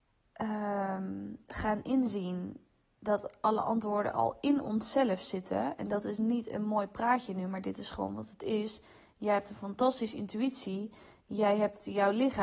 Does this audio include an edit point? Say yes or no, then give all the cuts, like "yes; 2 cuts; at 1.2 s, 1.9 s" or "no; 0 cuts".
no; 0 cuts